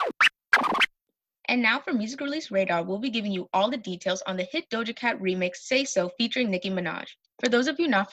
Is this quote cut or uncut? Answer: uncut